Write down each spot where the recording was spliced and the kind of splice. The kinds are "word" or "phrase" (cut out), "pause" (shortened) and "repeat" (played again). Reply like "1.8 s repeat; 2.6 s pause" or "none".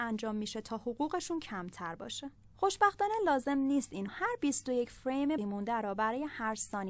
2.5 s pause; 4.1 s word; 5.4 s word